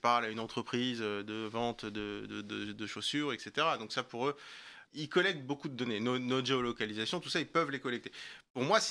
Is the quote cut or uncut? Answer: cut